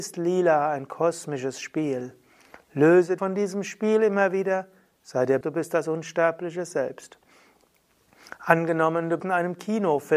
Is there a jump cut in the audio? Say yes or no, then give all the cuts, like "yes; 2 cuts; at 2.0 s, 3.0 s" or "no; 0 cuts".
yes; 3 cuts; at 3.2 s, 5.4 s, 9.2 s